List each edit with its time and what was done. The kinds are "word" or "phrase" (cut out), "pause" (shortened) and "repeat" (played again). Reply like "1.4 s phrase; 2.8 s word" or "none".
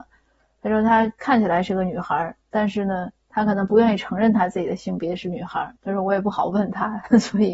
2.4 s pause; 5.8 s pause